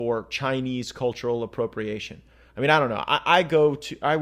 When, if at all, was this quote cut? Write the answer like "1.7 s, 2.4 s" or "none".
none